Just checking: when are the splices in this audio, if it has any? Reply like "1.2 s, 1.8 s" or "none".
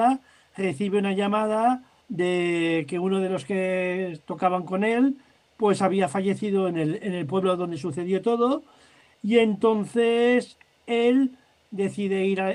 2.0 s